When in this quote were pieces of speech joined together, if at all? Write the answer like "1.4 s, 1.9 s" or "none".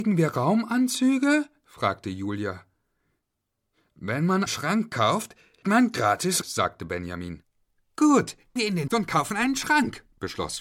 4.5 s, 5.6 s, 6.4 s, 8.6 s, 8.9 s